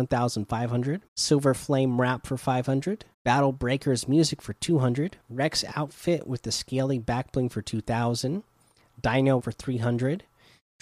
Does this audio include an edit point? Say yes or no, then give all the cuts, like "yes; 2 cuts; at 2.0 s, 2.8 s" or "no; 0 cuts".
yes; 4 cuts; at 1.1 s, 3.1 s, 5.2 s, 9.4 s